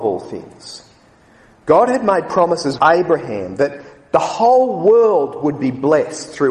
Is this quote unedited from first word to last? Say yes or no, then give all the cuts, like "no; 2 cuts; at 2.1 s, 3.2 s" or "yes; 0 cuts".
no; 1 cut; at 2.8 s